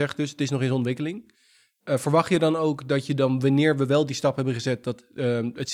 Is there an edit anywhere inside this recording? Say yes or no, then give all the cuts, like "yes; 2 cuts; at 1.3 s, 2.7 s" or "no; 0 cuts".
no; 0 cuts